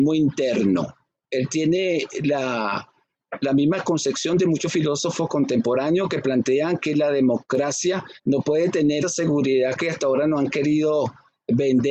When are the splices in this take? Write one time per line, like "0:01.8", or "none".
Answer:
0:01.1
0:03.4
0:08.2
0:09.0

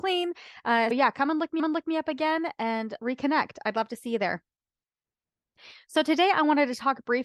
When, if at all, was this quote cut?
0:00.9
0:01.6
0:03.0

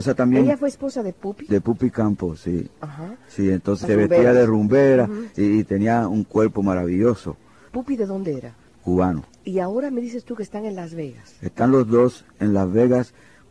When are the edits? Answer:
none

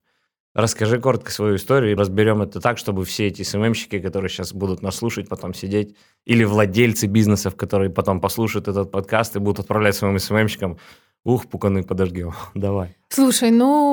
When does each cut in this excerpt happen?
0:02.0

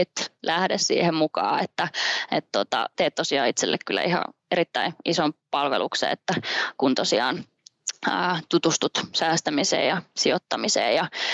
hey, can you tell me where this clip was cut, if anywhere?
0:02.9
0:06.7

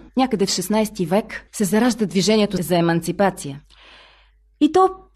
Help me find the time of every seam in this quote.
none

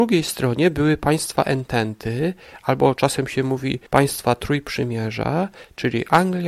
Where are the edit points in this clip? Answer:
0:03.9

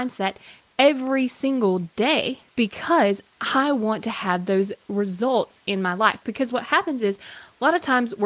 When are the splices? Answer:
0:02.5

